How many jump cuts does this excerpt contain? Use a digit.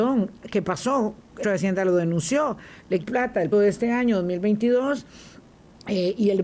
3